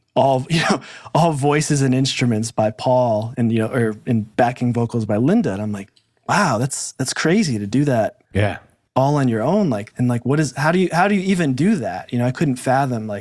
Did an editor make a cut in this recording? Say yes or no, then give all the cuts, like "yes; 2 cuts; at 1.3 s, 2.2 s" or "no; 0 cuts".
yes; 3 cuts; at 4.3 s, 8.3 s, 9.9 s